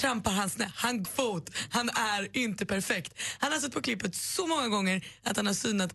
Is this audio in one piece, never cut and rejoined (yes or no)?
no